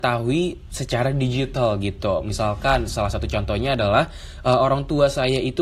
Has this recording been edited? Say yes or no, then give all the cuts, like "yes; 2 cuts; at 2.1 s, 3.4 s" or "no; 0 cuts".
no; 0 cuts